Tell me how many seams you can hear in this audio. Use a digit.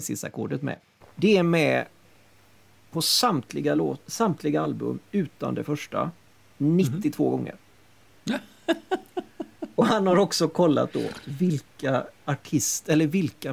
0